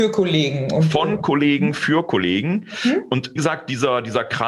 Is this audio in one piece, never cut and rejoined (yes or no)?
no